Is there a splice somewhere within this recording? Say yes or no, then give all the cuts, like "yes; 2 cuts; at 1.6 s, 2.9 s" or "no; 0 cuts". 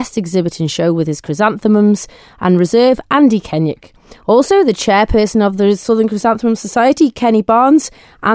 no; 0 cuts